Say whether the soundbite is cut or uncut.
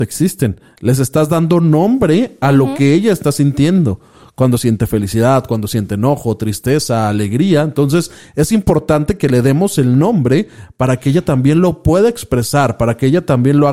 uncut